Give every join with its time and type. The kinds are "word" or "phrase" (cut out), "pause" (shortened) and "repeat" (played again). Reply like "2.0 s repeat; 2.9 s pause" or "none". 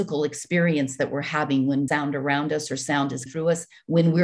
1.9 s word; 3.3 s word